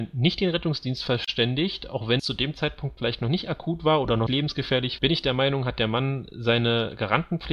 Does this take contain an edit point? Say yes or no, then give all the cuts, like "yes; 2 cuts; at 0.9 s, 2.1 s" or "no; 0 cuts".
yes; 3 cuts; at 2.2 s, 4.3 s, 5.0 s